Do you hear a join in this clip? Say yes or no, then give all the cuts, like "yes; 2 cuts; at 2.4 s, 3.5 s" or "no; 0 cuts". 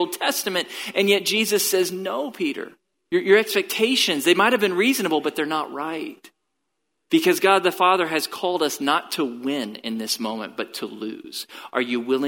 yes; 1 cut; at 2.9 s